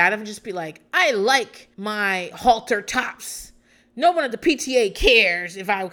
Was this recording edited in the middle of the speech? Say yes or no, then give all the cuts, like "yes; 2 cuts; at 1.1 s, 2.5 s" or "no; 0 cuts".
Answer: yes; 1 cut; at 1.7 s